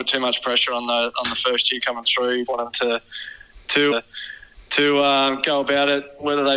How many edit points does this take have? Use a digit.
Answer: 3